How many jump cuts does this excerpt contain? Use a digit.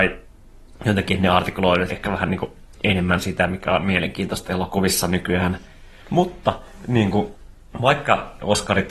1